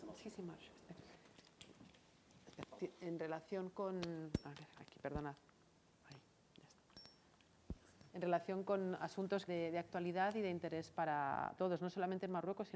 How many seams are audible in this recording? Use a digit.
3